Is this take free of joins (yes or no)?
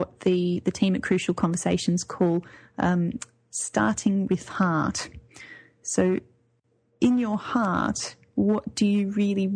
yes